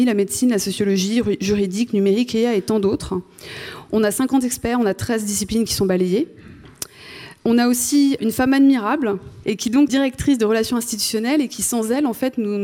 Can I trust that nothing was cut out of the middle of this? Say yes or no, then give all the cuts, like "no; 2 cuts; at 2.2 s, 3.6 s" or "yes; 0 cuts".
no; 3 cuts; at 8.2 s, 9.4 s, 9.9 s